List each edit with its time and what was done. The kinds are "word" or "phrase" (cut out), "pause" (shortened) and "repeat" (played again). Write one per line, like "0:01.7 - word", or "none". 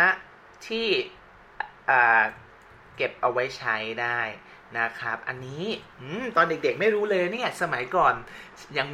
none